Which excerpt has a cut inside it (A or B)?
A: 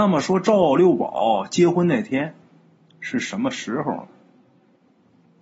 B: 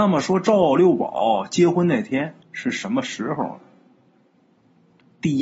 B